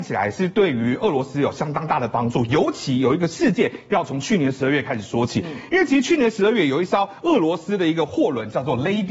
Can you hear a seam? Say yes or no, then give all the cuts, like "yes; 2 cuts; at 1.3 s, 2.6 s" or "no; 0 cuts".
no; 0 cuts